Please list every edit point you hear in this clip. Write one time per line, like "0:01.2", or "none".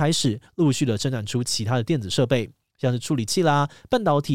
none